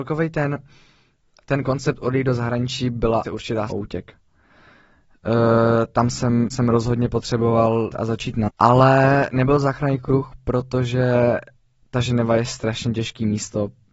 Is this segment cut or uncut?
cut